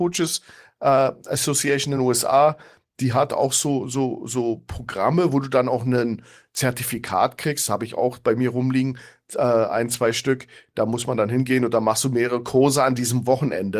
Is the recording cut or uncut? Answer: uncut